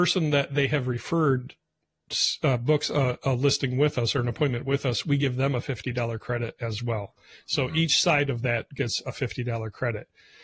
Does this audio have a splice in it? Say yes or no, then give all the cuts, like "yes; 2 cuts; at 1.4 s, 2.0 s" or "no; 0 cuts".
no; 0 cuts